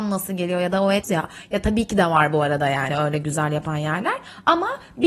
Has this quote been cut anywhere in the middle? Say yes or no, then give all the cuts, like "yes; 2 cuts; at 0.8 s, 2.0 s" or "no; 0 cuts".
yes; 2 cuts; at 1.0 s, 2.9 s